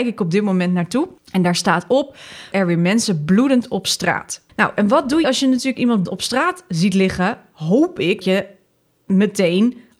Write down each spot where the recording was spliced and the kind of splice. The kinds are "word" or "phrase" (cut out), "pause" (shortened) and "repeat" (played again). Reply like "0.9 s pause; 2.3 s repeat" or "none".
1.2 s pause; 2.5 s phrase; 4.5 s pause; 5.2 s word; 6.1 s word; 8.2 s word